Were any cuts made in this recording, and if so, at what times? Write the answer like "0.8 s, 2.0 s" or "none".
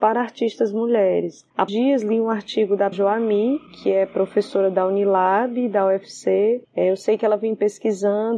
1.7 s, 2.9 s, 6.6 s